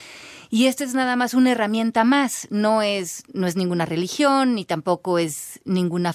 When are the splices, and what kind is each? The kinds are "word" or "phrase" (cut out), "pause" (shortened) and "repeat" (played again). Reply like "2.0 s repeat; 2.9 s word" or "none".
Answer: none